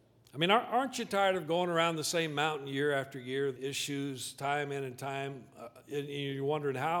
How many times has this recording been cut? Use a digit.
1